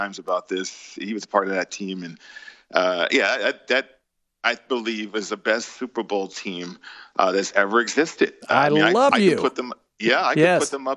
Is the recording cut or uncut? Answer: uncut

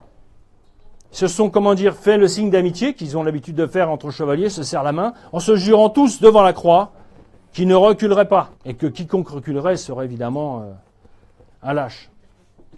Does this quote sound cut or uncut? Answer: cut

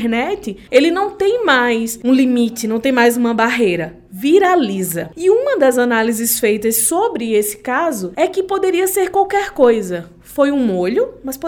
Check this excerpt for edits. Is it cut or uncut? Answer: uncut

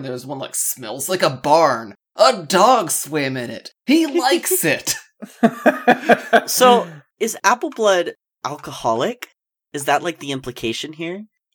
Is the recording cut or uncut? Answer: uncut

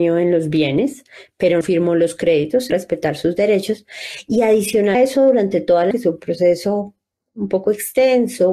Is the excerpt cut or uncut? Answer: cut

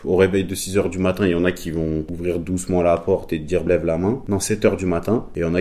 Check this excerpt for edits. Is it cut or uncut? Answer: cut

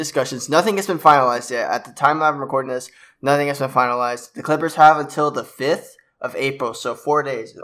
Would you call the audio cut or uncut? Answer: uncut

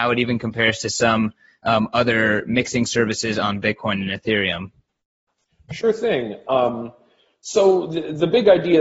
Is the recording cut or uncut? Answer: uncut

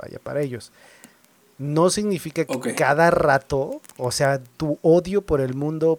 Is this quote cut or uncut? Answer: cut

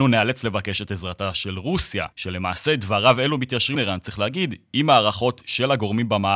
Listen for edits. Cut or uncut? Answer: cut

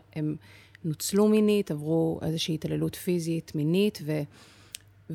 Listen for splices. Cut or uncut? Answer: uncut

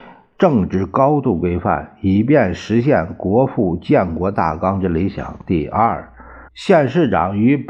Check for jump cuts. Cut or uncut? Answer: cut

